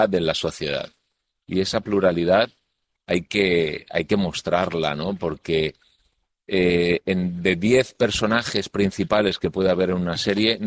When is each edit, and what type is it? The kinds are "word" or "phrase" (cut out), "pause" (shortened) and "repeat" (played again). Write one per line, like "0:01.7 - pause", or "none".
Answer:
none

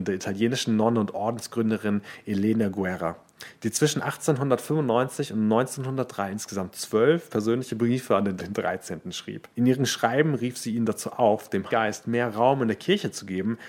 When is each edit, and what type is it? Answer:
0:08.4 - phrase
0:09.5 - pause
0:11.7 - word

